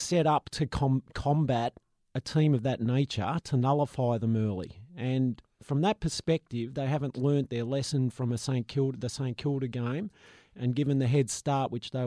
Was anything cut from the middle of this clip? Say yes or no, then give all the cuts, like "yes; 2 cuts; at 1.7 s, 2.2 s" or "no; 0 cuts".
no; 0 cuts